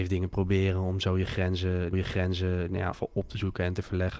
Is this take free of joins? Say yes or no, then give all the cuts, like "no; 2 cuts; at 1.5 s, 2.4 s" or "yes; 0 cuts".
no; 2 cuts; at 1.9 s, 2.9 s